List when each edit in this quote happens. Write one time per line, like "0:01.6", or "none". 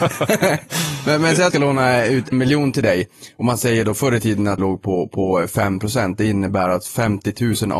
0:01.5
0:02.3
0:04.6